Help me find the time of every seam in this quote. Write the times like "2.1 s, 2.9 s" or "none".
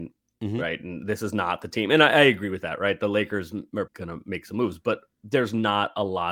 3.9 s